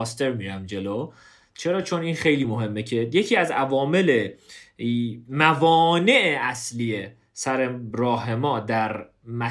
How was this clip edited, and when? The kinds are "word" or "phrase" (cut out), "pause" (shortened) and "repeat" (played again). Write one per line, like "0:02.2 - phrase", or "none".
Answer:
none